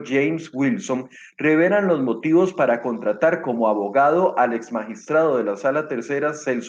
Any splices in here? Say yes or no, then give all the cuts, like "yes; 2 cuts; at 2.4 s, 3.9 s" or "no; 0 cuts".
no; 0 cuts